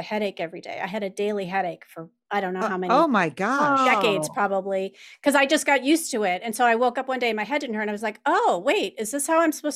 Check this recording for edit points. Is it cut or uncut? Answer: uncut